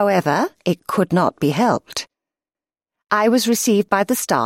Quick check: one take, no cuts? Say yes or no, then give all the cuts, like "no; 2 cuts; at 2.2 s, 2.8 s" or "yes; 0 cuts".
yes; 0 cuts